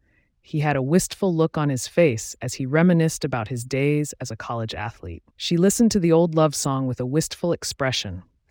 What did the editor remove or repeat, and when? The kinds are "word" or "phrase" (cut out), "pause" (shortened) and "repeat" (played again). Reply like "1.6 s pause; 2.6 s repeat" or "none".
5.3 s pause